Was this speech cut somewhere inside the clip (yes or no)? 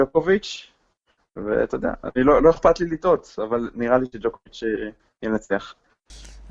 no